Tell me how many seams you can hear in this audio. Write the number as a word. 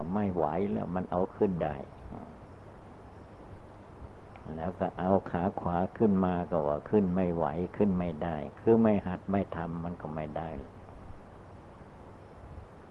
one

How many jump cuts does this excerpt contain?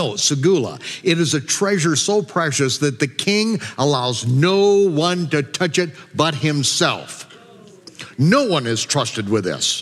zero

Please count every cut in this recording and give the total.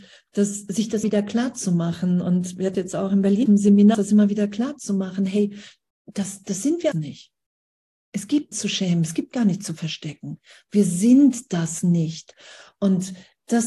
seven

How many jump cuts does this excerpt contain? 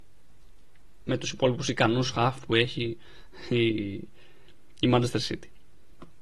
zero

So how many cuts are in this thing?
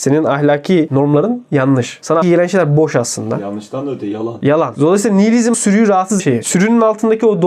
three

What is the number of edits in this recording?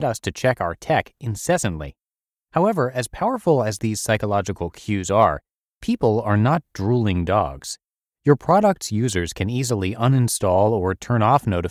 zero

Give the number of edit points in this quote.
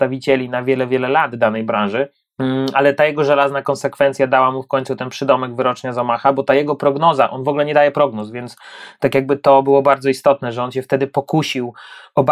zero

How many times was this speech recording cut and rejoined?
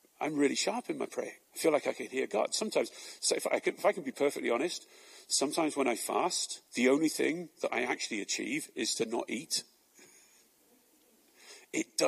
two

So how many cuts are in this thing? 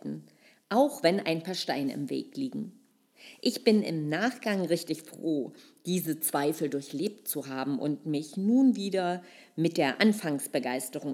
zero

